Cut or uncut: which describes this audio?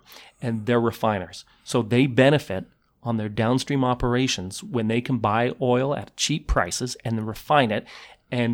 uncut